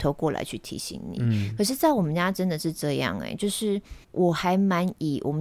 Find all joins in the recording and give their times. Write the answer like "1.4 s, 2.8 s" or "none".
4.0 s